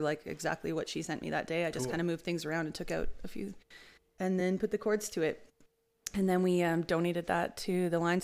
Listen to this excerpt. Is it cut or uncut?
uncut